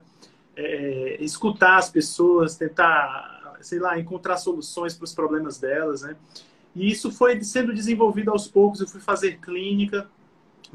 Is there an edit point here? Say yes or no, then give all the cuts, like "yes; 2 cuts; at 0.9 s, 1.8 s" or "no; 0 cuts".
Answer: no; 0 cuts